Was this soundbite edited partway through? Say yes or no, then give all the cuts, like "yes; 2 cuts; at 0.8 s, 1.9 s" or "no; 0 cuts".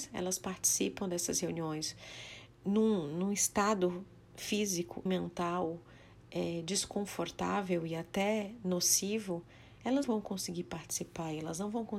yes; 2 cuts; at 5.1 s, 10.0 s